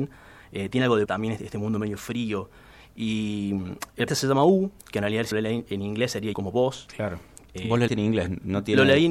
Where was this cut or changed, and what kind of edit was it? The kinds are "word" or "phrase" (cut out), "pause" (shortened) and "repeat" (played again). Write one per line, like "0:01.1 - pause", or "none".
0:01.0 - word
0:04.1 - word
0:05.3 - word
0:06.3 - word
0:07.9 - word